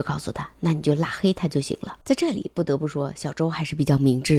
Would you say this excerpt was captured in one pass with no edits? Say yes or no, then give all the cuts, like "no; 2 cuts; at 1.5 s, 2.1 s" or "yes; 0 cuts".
no; 1 cut; at 2.0 s